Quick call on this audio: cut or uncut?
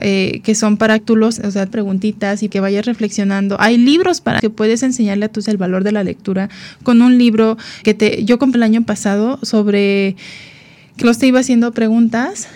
cut